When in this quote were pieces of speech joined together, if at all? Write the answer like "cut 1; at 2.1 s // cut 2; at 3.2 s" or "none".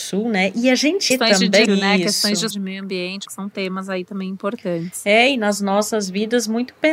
cut 1; at 1.1 s // cut 2; at 1.7 s // cut 3; at 2.5 s // cut 4; at 3.3 s